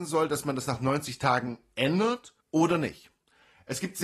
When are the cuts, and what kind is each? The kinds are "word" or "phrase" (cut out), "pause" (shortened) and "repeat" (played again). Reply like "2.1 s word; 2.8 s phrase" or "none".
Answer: 2.4 s pause